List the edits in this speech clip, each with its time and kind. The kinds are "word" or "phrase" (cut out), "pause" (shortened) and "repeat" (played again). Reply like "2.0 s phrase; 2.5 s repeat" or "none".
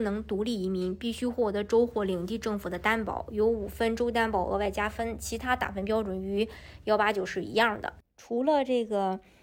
8.0 s pause